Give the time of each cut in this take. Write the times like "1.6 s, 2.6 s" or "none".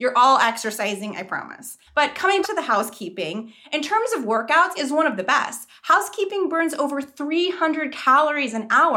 1.9 s, 2.4 s, 4.7 s